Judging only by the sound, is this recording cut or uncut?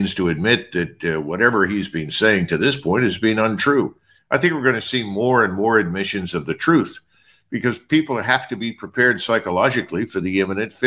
uncut